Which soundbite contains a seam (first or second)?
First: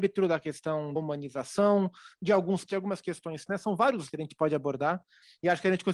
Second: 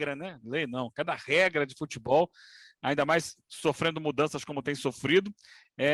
first